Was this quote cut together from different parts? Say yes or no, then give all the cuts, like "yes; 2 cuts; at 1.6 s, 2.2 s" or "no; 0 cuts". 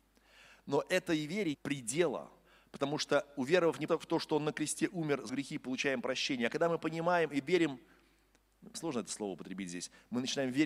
yes; 4 cuts; at 1.5 s, 3.9 s, 5.3 s, 8.7 s